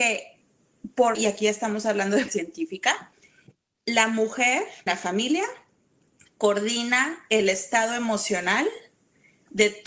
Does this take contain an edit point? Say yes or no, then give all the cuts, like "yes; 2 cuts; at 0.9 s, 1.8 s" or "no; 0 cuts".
yes; 3 cuts; at 1.1 s, 2.3 s, 4.9 s